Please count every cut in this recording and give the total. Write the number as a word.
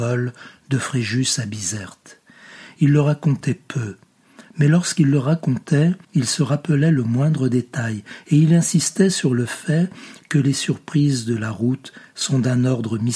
one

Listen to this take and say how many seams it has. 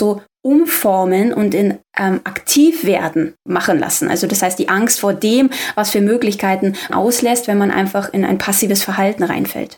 two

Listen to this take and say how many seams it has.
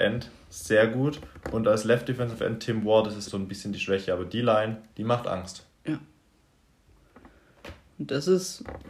three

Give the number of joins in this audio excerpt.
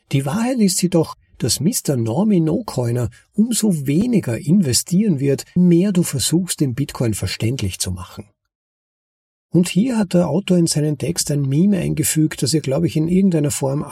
one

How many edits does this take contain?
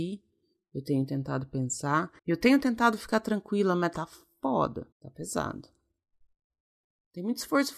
two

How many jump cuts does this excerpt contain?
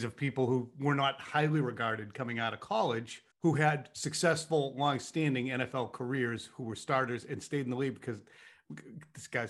one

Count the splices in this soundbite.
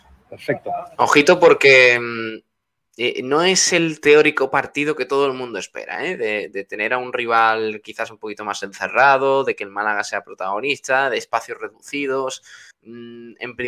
one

